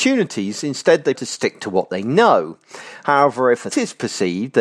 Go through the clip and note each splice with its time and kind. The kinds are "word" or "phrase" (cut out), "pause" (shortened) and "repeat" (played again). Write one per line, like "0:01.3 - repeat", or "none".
0:01.1 - word
0:03.7 - word

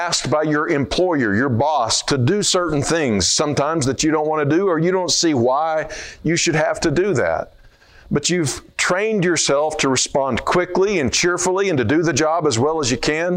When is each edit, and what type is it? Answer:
none

